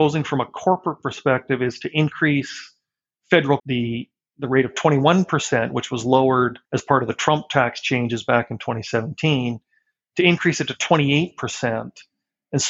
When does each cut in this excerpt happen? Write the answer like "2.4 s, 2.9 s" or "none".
3.6 s, 6.6 s